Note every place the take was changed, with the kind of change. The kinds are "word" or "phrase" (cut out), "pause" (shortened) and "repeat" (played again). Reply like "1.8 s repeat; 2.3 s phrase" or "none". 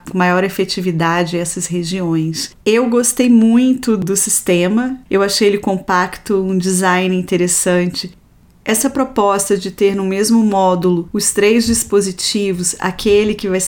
2.6 s pause; 5.0 s pause